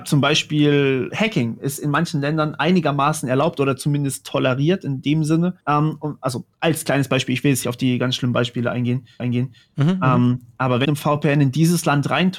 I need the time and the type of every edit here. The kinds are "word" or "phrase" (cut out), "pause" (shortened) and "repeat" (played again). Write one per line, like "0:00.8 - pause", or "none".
0:01.1 - word
0:05.6 - pause
0:06.5 - pause
0:07.6 - word
0:09.2 - repeat
0:10.8 - phrase